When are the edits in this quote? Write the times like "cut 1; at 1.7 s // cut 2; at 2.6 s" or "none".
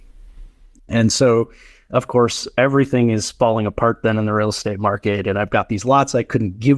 none